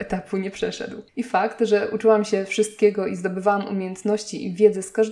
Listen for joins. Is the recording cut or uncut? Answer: cut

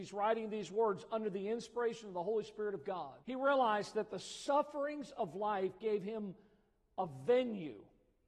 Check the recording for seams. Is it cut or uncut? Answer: cut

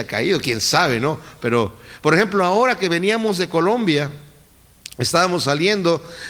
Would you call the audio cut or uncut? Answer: uncut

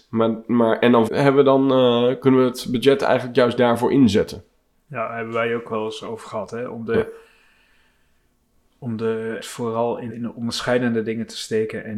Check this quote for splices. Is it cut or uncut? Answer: cut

